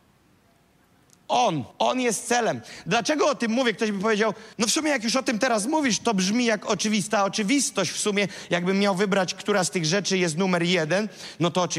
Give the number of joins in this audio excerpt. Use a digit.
2